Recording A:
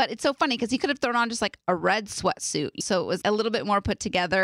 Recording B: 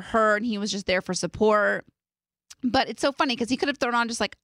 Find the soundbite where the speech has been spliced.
A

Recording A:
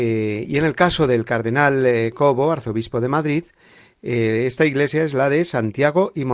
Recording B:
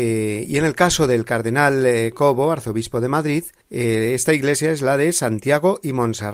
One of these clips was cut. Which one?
B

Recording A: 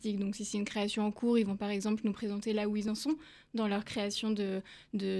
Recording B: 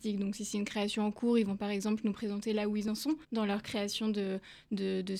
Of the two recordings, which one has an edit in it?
B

